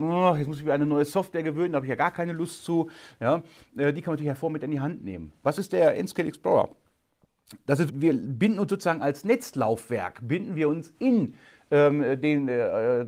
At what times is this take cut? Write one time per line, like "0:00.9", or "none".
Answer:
0:07.9